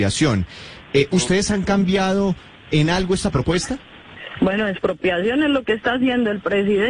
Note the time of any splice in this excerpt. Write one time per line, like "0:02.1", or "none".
none